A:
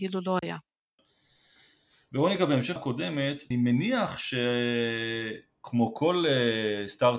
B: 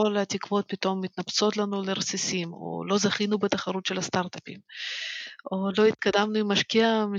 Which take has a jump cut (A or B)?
A